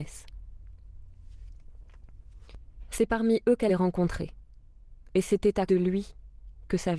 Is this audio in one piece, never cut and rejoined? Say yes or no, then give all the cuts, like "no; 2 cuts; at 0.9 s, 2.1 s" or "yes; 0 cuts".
no; 2 cuts; at 3.7 s, 5.7 s